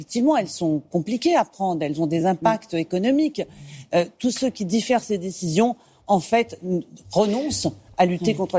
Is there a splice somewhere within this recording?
no; 0 cuts

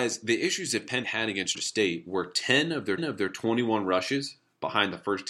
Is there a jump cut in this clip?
yes; 3 cuts; at 1.0 s, 1.5 s, 3.0 s

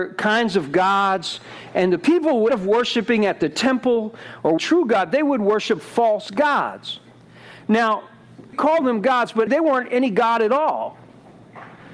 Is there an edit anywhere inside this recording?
yes; 4 cuts; at 2.5 s, 4.6 s, 8.5 s, 9.5 s

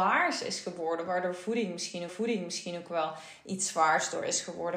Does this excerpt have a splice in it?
yes; 1 cut; at 2.1 s

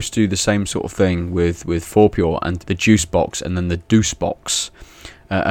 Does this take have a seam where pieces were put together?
yes; 1 cut; at 2.6 s

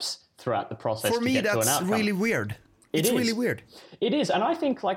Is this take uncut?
yes; 0 cuts

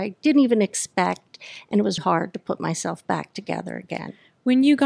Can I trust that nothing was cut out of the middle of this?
no; 1 cut; at 2.0 s

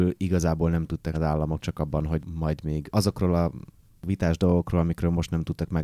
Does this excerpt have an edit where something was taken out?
yes; 1 cut; at 1.1 s

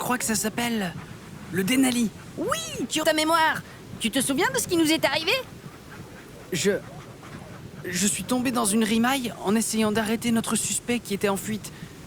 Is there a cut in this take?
yes; 1 cut; at 3.0 s

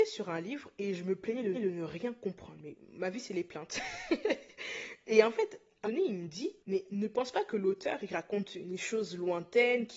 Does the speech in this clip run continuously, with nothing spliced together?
no; 3 cuts; at 1.5 s, 5.8 s, 6.6 s

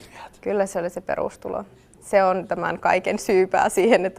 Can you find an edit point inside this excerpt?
no; 0 cuts

